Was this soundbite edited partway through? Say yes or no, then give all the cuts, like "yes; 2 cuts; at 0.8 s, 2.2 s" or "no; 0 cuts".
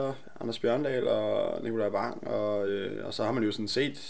no; 0 cuts